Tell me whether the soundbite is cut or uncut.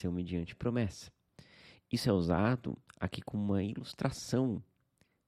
uncut